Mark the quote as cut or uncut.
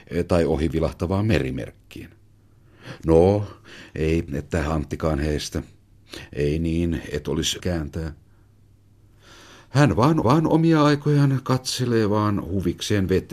cut